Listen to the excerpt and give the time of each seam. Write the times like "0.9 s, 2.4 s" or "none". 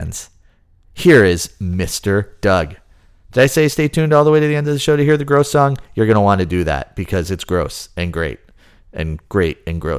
none